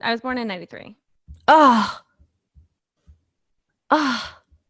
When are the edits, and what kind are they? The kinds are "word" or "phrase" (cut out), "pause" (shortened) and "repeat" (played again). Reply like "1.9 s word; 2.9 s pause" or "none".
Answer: none